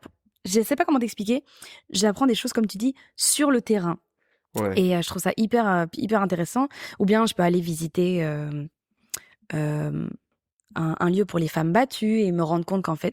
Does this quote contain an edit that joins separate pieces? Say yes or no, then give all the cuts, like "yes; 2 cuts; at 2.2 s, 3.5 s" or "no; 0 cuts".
no; 0 cuts